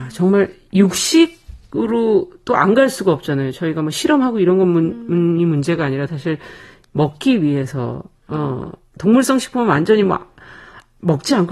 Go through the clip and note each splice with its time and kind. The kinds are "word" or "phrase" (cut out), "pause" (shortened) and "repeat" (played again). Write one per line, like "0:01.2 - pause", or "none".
0:06.1 - word